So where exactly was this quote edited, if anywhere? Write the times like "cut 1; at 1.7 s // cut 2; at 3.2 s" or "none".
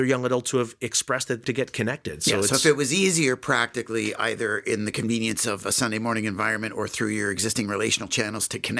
cut 1; at 1.4 s

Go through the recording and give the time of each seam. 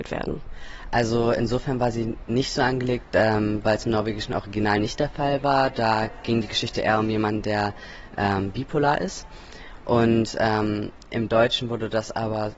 none

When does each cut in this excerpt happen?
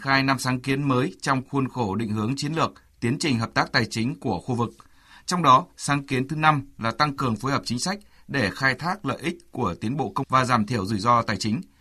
cut 1; at 10.2 s

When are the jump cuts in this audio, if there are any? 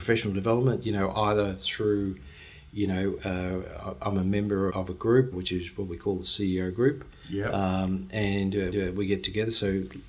cut 1; at 4.7 s // cut 2; at 5.3 s // cut 3; at 8.7 s

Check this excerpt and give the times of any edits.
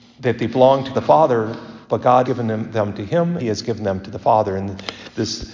cut 1; at 0.9 s // cut 2; at 1.8 s // cut 3; at 2.2 s // cut 4; at 3.4 s

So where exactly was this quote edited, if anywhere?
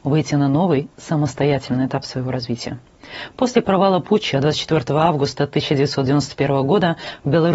none

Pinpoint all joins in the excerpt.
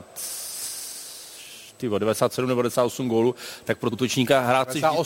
cut 1; at 3.9 s

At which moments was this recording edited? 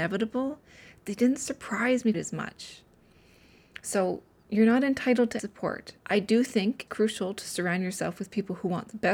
cut 1; at 2.1 s // cut 2; at 5.4 s // cut 3; at 6.0 s // cut 4; at 6.9 s

